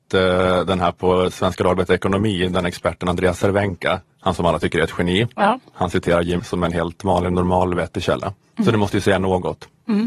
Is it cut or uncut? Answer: cut